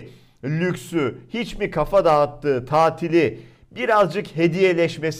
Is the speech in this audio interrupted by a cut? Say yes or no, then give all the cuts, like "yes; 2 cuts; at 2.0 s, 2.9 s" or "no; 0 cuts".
no; 0 cuts